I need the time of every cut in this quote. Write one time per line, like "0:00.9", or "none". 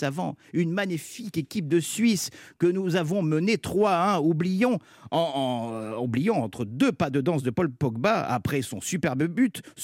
none

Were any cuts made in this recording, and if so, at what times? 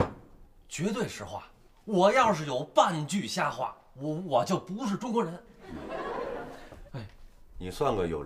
0:01.7
0:06.9

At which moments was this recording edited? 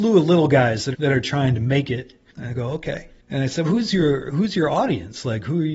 0:00.9
0:03.6

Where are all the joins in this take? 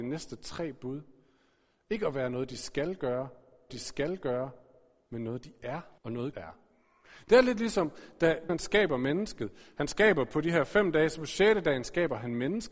0:03.7
0:06.0
0:06.3
0:08.5

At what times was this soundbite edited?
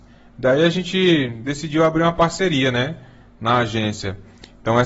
none

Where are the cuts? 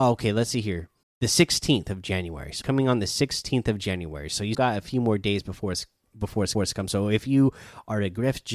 0:01.0
0:02.6
0:04.5
0:06.5

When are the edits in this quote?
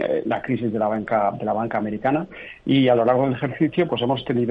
none

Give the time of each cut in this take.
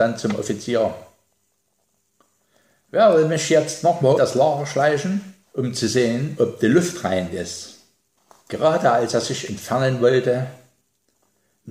0:04.2
0:05.4
0:08.3

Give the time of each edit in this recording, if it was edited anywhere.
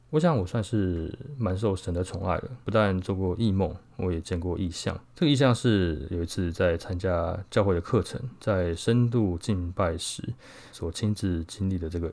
0:02.6
0:05.1
0:10.7

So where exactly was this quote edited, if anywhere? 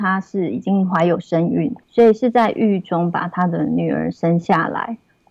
0:01.8

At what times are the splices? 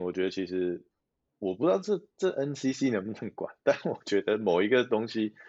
none

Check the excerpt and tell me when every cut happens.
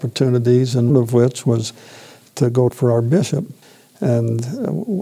0:00.9
0:02.7
0:03.6

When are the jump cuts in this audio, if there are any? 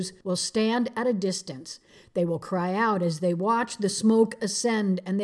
none

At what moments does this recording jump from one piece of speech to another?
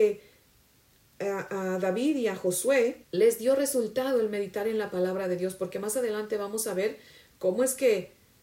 0:03.0

